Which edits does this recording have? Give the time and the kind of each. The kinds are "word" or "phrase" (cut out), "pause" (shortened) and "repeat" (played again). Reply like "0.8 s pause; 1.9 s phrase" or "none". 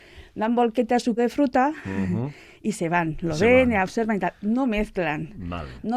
1.2 s word